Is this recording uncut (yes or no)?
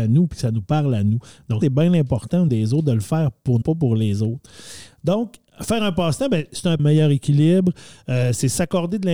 no